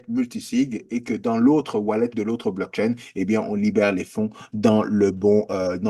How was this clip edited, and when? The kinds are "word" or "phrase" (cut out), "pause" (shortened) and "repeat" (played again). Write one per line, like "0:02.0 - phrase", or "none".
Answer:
0:02.1 - word